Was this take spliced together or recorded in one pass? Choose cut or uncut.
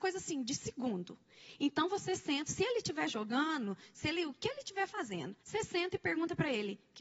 cut